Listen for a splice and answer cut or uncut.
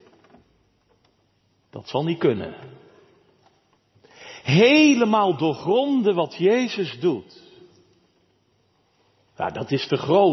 uncut